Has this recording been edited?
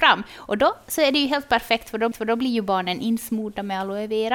yes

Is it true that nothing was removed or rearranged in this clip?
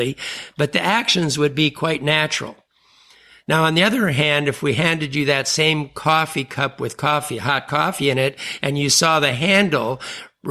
yes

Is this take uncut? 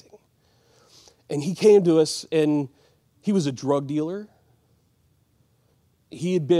yes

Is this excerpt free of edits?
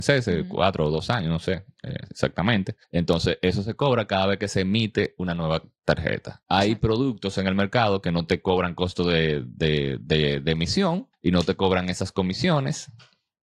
no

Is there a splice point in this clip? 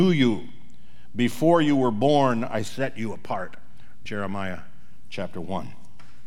no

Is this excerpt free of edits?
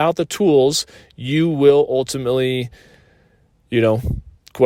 yes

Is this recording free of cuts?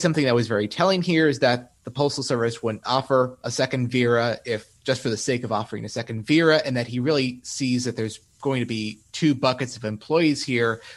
yes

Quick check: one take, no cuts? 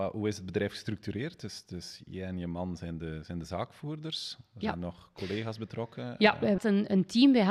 no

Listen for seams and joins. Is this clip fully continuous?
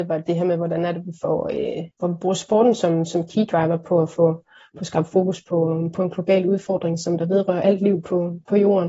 yes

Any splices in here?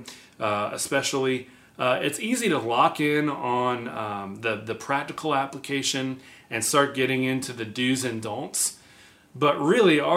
no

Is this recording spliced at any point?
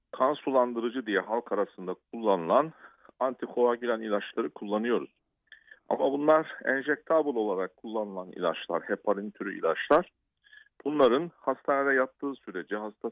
no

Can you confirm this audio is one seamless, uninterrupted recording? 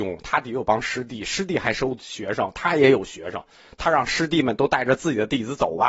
yes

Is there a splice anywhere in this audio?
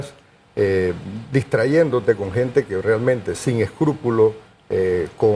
no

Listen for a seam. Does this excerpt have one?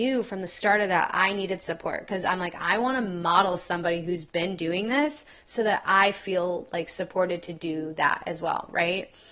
no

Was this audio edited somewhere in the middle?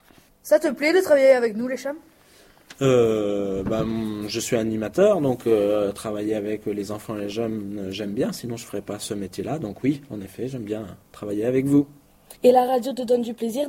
yes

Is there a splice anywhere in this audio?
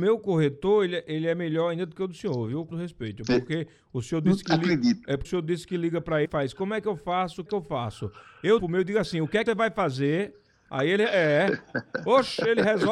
yes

